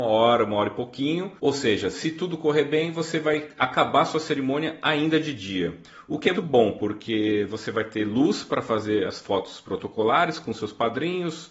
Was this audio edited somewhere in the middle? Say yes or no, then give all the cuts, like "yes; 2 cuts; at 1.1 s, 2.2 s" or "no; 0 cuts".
yes; 2 cuts; at 1.4 s, 6.3 s